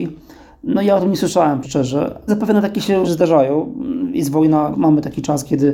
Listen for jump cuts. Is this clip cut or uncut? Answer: cut